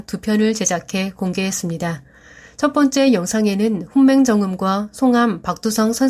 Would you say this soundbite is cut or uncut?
uncut